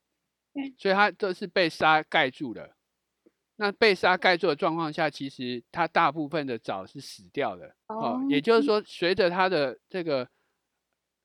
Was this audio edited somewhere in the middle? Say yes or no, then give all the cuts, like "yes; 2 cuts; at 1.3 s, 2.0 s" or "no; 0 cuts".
yes; 1 cut; at 7.8 s